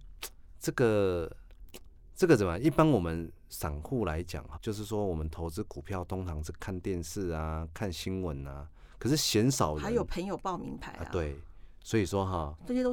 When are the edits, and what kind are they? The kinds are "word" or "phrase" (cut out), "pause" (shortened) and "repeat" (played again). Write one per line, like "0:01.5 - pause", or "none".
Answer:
0:04.5 - word